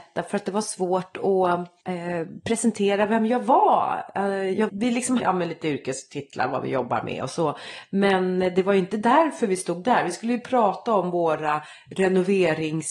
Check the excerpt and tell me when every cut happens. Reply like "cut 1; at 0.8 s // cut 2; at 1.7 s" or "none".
cut 1; at 1.8 s // cut 2; at 4.7 s // cut 3; at 5.2 s